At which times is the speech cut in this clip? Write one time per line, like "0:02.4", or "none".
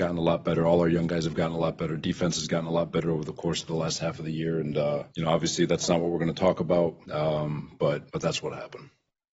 0:05.1
0:07.0
0:08.1